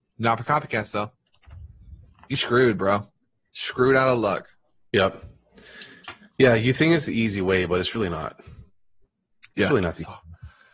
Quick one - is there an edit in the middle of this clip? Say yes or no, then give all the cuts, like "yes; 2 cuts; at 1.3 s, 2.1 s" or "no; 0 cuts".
no; 0 cuts